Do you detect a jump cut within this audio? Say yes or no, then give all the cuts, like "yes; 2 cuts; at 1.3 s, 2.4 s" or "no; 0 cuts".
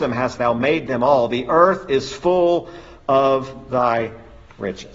no; 0 cuts